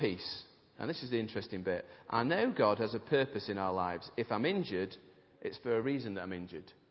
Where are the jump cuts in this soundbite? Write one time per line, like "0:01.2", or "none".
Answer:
none